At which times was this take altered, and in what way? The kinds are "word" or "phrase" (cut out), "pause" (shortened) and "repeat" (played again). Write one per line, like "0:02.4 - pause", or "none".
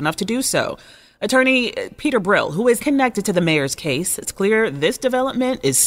0:02.8 - word
0:04.2 - word